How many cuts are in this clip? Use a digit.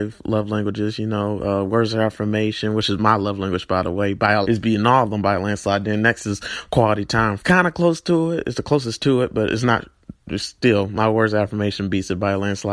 2